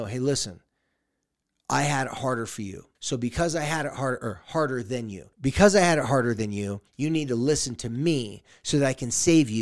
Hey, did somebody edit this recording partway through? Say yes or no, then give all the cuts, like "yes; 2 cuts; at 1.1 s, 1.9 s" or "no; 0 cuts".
yes; 3 cuts; at 2.9 s, 5.3 s, 6.9 s